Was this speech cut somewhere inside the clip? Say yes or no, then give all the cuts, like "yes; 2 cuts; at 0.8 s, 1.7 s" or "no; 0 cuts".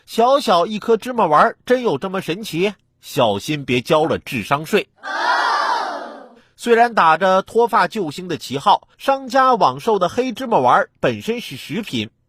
yes; 3 cuts; at 2.8 s, 4.9 s, 8.9 s